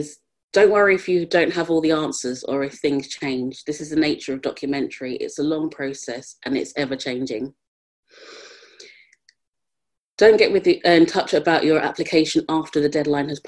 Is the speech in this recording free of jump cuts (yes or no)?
yes